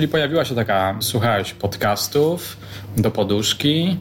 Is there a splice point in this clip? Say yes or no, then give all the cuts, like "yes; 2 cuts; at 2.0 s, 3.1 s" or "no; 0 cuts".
yes; 1 cut; at 1.0 s